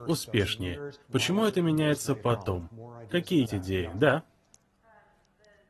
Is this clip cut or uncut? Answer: cut